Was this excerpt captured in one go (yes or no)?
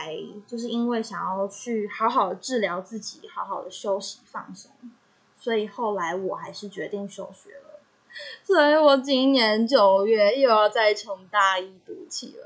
yes